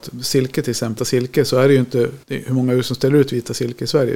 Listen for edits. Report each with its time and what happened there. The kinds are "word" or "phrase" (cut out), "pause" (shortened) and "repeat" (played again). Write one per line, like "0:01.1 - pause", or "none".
0:01.0 - word
0:02.2 - pause